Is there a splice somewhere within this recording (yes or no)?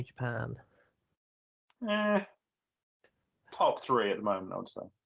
no